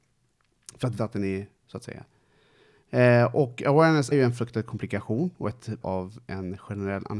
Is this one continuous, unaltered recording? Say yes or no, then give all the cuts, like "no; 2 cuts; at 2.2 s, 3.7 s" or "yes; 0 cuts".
no; 4 cuts; at 1.0 s, 1.6 s, 4.1 s, 5.8 s